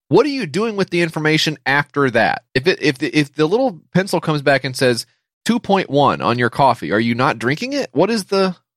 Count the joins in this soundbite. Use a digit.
1